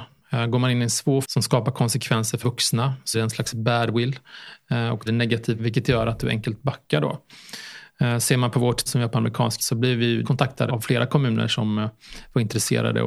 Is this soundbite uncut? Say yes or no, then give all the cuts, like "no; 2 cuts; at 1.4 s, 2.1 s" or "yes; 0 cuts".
no; 9 cuts; at 1.2 s, 2.4 s, 3.1 s, 5.1 s, 5.6 s, 8.9 s, 9.6 s, 10.2 s, 10.7 s